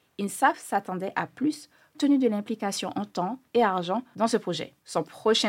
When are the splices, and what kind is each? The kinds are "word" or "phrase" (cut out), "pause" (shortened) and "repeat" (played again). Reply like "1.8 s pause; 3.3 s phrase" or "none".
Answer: 1.9 s word; 3.5 s word